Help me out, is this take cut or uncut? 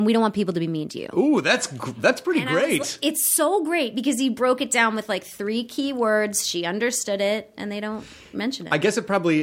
uncut